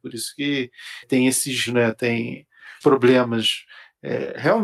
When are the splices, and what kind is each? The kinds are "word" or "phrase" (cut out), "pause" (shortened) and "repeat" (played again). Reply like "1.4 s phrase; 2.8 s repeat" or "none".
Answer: 1.0 s word; 1.7 s word; 2.8 s word